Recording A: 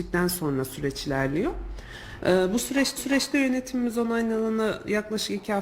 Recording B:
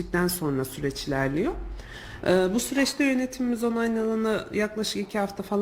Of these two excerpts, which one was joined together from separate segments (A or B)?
A